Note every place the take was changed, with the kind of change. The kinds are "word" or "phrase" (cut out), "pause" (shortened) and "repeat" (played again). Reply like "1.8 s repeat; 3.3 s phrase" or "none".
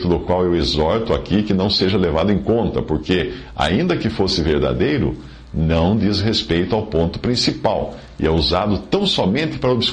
none